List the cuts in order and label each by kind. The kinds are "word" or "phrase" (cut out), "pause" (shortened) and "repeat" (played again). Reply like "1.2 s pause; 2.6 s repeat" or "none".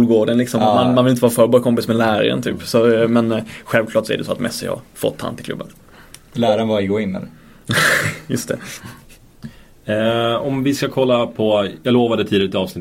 4.9 s pause